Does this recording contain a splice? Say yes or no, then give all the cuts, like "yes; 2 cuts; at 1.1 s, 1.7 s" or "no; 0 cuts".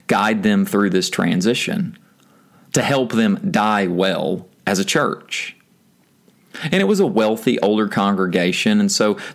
no; 0 cuts